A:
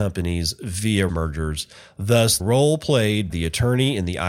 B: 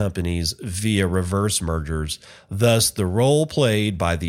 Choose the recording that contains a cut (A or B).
A